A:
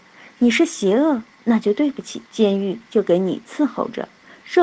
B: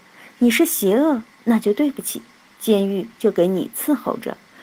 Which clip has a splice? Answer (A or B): A